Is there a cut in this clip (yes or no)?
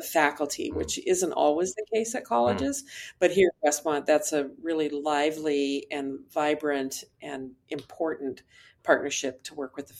no